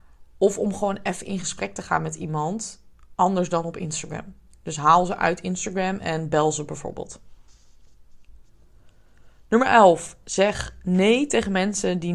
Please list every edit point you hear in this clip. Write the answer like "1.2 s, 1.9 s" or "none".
none